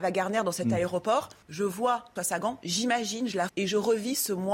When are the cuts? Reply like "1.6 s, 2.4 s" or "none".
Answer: 1.4 s, 2.2 s, 3.5 s